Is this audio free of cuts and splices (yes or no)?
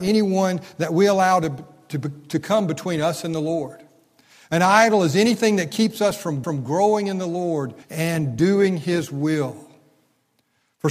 no